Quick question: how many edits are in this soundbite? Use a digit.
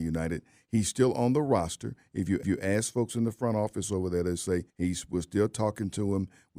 2